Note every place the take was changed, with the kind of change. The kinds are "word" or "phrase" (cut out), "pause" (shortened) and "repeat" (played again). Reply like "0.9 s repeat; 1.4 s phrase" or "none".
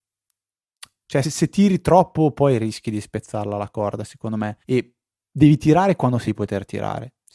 1.2 s word; 4.6 s pause; 6.3 s word